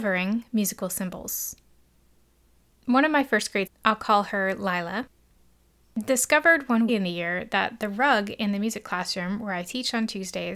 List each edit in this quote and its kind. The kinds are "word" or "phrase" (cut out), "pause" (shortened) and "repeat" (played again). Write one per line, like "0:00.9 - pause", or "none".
0:03.7 - word
0:06.9 - phrase